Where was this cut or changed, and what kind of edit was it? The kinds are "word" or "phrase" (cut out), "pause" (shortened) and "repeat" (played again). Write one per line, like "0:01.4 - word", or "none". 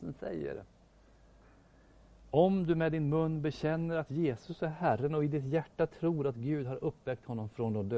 none